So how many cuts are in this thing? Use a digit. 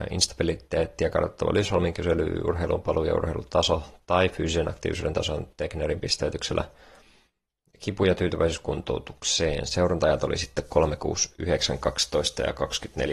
0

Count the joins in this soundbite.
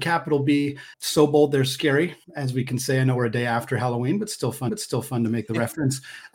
3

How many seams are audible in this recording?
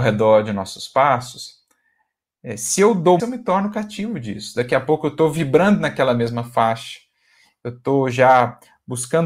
1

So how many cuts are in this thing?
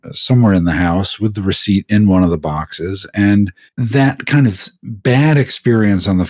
1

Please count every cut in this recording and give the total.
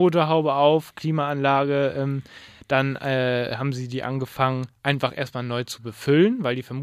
0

